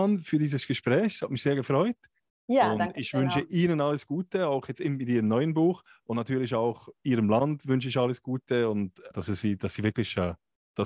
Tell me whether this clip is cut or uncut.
cut